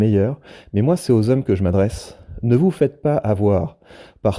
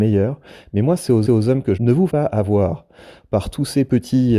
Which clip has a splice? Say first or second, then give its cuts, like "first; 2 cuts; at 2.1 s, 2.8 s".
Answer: second; 3 cuts; at 1.3 s, 1.8 s, 2.1 s